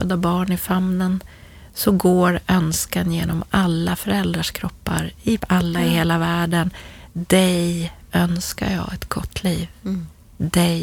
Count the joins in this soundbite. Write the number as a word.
one